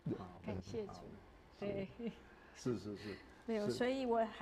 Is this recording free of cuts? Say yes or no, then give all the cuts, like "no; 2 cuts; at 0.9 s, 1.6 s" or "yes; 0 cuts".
yes; 0 cuts